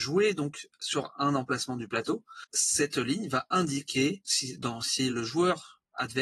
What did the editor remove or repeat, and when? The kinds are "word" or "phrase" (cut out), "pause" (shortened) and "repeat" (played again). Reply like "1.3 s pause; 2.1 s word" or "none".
2.5 s pause; 4.2 s word; 5.1 s word